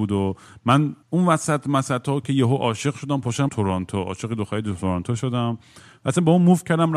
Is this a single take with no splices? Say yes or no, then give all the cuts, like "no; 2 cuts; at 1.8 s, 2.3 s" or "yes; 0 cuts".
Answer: no; 2 cuts; at 1.0 s, 3.5 s